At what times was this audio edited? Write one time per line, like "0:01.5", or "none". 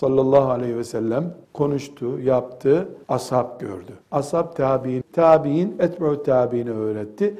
0:01.4
0:03.0
0:04.0
0:05.0